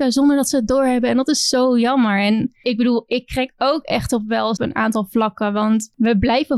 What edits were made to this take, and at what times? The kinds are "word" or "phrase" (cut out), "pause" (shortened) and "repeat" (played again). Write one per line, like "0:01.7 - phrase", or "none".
0:04.6 - phrase